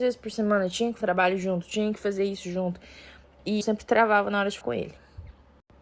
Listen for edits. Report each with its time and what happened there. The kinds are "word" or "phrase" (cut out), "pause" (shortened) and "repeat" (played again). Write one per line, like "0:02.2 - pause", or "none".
0:01.0 - word
0:03.6 - word
0:04.6 - word